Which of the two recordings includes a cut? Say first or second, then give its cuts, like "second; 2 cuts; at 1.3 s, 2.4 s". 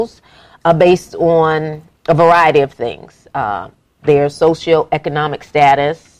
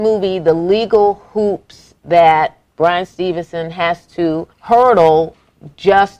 second; 1 cut; at 4.5 s